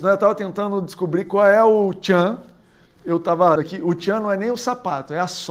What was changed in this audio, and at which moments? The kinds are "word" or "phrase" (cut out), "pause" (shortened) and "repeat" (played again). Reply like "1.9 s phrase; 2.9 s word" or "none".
3.6 s word